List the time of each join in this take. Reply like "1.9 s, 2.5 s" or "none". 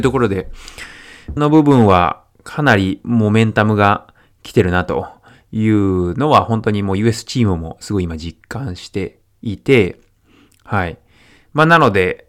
1.4 s